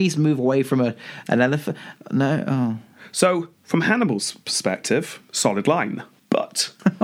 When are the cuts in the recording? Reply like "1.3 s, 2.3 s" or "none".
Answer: 3.6 s